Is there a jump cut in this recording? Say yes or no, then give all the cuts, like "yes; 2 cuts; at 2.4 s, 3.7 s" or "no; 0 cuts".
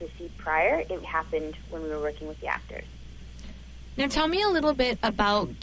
yes; 1 cut; at 1.0 s